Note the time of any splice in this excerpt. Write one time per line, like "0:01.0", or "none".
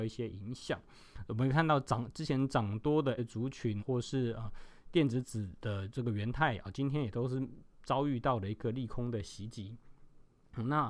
0:03.2
0:03.8